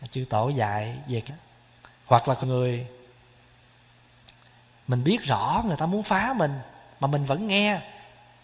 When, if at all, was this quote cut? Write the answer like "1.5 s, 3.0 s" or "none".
1.3 s, 2.0 s, 2.4 s